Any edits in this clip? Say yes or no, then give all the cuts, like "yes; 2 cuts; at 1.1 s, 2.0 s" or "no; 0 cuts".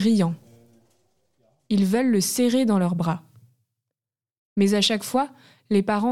no; 0 cuts